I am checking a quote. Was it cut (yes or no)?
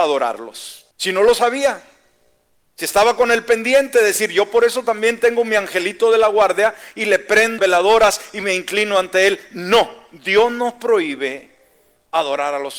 yes